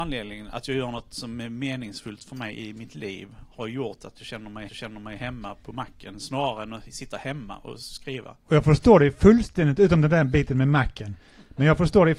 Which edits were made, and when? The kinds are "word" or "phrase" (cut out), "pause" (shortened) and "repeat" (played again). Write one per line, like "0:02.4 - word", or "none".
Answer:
0:04.7 - repeat